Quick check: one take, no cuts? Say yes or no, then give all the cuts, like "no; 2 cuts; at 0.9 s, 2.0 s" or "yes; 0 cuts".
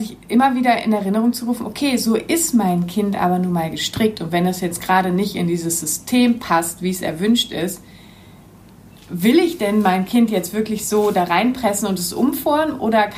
yes; 0 cuts